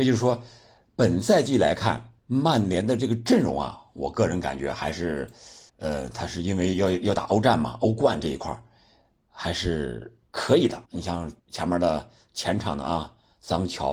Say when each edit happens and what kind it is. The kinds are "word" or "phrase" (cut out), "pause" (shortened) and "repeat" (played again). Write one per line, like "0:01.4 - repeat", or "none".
0:02.2 - pause
0:05.7 - pause
0:10.3 - pause
0:10.9 - pause
0:11.4 - pause